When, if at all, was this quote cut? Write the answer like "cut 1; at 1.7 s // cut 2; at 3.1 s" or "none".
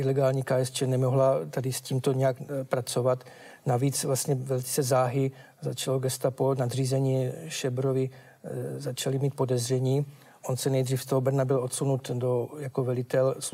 none